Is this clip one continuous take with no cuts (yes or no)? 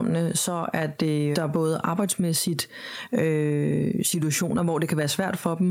no